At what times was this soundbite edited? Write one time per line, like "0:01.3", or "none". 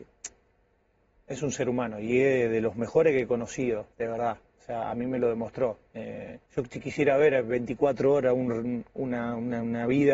0:03.9
0:06.5